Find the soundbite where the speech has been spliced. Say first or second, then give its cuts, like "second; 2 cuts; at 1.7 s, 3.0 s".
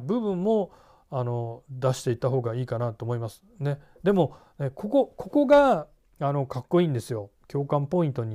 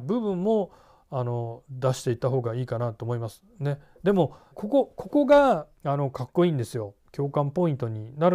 second; 2 cuts; at 4.5 s, 5.8 s